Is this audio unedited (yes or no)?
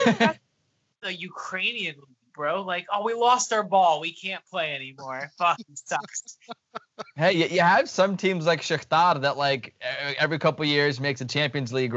yes